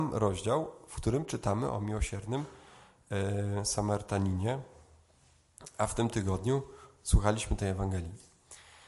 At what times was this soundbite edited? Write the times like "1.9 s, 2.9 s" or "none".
none